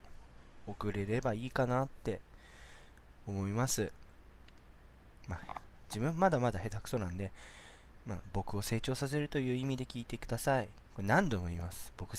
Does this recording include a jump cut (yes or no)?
yes